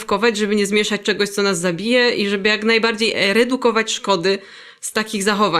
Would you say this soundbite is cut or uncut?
uncut